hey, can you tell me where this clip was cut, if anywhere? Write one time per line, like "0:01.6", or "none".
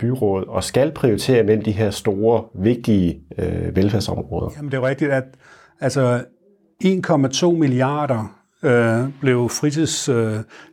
none